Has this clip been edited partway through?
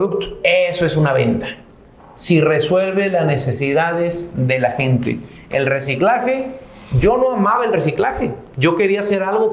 no; 0 cuts

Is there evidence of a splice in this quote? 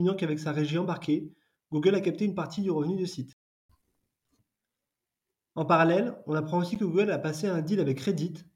no; 0 cuts

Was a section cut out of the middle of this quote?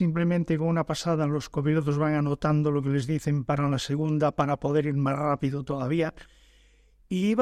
no; 0 cuts

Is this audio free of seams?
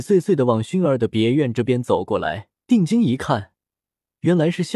no; 1 cut; at 2.5 s

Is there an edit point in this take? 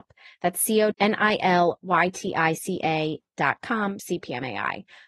yes; 2 cuts; at 0.9 s, 4.0 s

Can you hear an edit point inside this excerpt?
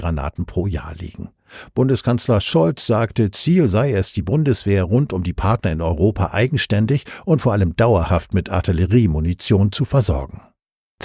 no; 0 cuts

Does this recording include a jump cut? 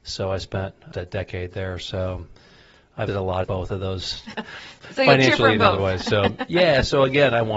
yes; 4 cuts; at 0.9 s, 3.1 s, 3.4 s, 4.3 s

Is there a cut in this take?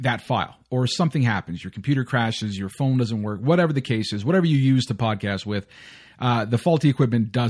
no; 0 cuts

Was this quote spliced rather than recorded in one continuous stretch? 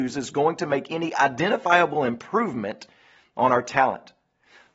no; 0 cuts

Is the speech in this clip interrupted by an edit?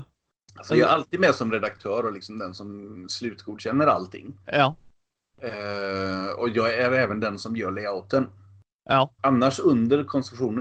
yes; 2 cuts; at 4.4 s, 9.2 s

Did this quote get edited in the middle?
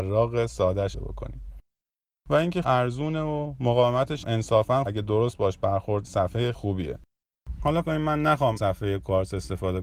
yes; 8 cuts; at 0.9 s, 2.6 s, 4.2 s, 4.9 s, 6.0 s, 6.5 s, 7.8 s, 8.6 s

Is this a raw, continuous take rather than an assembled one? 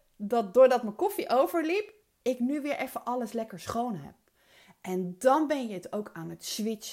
yes; 0 cuts

